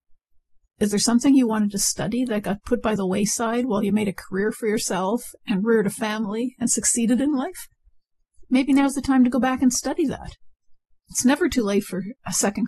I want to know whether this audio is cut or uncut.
uncut